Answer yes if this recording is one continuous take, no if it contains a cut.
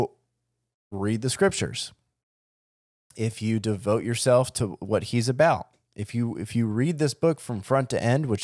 yes